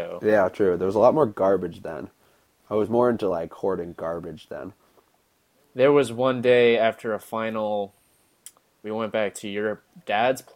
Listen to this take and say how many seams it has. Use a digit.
0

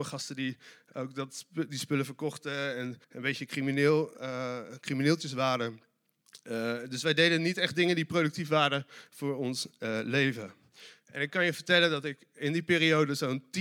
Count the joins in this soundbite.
1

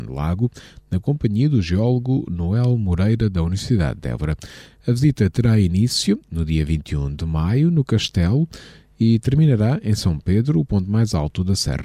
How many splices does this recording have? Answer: 0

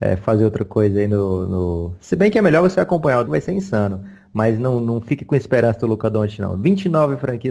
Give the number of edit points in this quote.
1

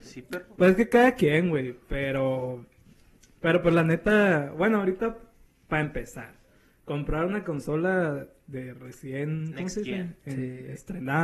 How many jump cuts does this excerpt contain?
0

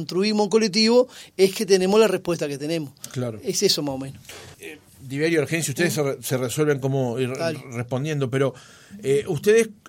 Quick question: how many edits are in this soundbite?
1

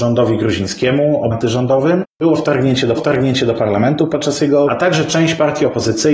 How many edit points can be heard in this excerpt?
3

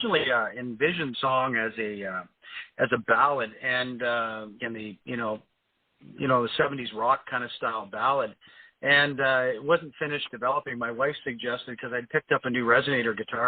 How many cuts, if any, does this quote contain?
3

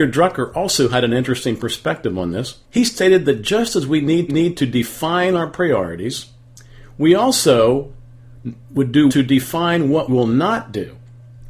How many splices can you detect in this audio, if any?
4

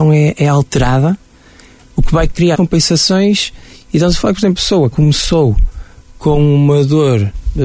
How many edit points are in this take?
3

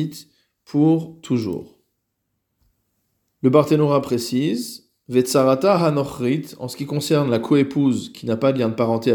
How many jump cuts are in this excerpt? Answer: 0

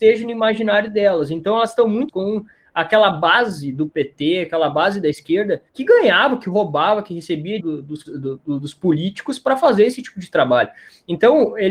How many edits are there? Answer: 4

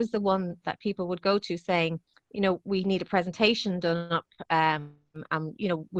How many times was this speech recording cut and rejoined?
1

